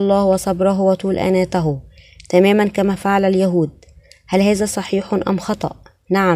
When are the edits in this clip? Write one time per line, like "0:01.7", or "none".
none